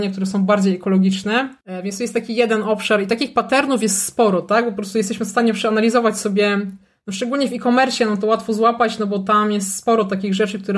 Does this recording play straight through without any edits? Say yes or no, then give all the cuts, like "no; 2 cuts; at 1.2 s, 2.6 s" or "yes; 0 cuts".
yes; 0 cuts